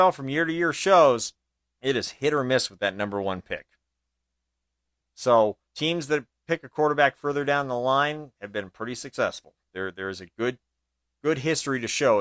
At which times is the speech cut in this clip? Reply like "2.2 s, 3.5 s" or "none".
1.6 s, 5.6 s, 9.6 s